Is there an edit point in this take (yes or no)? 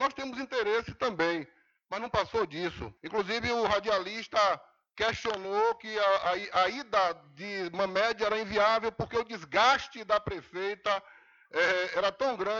yes